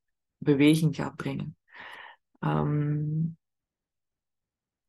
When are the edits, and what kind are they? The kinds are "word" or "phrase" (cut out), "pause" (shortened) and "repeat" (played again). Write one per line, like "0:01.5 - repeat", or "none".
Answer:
none